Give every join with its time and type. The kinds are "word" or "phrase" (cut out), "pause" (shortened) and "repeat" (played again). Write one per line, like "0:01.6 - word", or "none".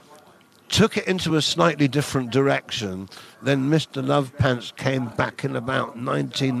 none